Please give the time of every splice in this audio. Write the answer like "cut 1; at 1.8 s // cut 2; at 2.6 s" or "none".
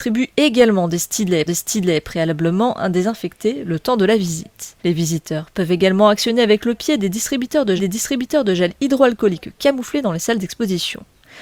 cut 1; at 1.5 s // cut 2; at 4.8 s // cut 3; at 7.8 s